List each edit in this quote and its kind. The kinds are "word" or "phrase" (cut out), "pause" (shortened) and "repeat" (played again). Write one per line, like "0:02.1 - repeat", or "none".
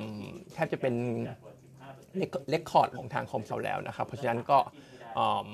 0:02.9 - word
0:03.5 - word